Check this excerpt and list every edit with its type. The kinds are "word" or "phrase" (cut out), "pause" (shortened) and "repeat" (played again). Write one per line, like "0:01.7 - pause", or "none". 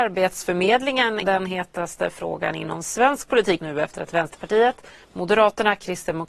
0:01.2 - word
0:03.6 - word